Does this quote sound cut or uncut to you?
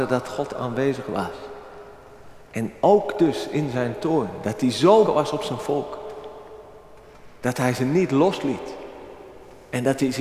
cut